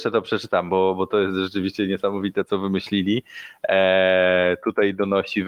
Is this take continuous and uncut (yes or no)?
yes